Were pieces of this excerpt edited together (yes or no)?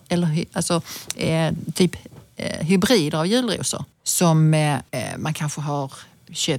no